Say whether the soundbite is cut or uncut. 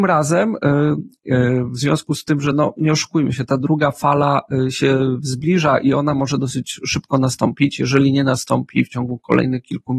uncut